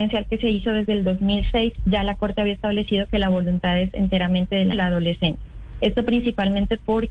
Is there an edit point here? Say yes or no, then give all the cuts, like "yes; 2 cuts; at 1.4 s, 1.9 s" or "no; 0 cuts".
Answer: yes; 1 cut; at 4.7 s